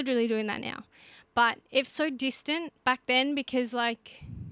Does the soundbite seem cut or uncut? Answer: cut